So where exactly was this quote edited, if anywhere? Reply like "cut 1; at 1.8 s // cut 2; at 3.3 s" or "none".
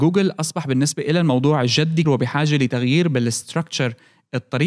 cut 1; at 2.0 s

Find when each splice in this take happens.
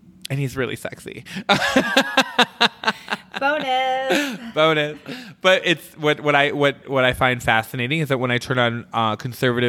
cut 1; at 6.8 s

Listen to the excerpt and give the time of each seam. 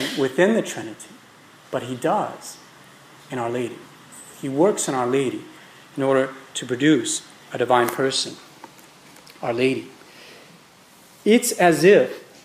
none

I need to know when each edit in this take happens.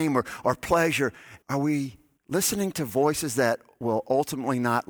cut 1; at 1.4 s // cut 2; at 2.2 s

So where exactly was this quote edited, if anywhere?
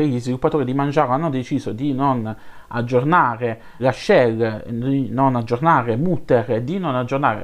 cut 1; at 3.8 s

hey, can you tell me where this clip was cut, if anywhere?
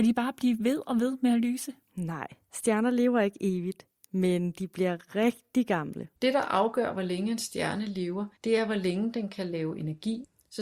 cut 1; at 1.8 s // cut 2; at 6.2 s // cut 3; at 8.4 s

